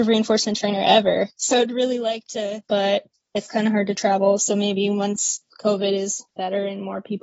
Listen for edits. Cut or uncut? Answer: cut